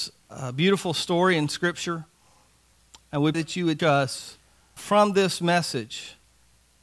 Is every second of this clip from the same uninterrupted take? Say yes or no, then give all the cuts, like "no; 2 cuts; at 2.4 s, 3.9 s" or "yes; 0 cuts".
no; 3 cuts; at 3.3 s, 3.8 s, 4.8 s